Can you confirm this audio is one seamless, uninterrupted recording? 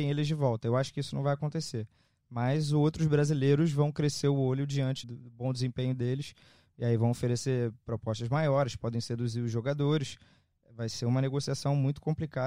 no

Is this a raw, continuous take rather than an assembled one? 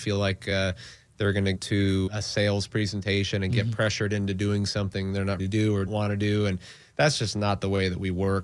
no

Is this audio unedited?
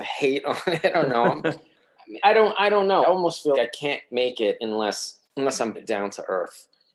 no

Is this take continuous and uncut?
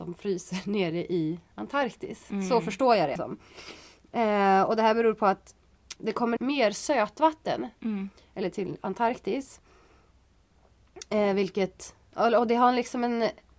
no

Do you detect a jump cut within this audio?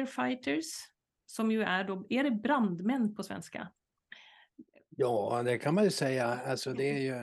no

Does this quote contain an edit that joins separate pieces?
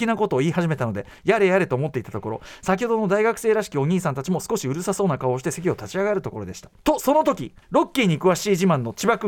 yes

